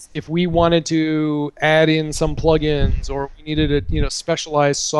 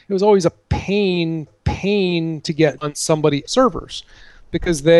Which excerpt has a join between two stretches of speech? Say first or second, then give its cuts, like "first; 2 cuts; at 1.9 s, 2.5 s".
second; 3 cuts; at 1.5 s, 2.8 s, 3.4 s